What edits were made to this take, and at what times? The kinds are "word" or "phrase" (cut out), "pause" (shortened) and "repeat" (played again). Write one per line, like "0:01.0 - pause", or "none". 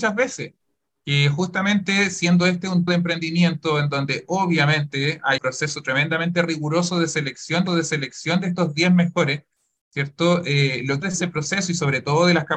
0:02.9 - word
0:05.4 - word
0:07.7 - repeat
0:11.0 - phrase